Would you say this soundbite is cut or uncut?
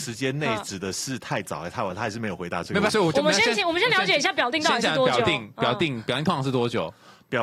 cut